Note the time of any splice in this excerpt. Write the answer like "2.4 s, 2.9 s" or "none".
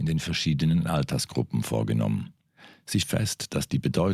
3.0 s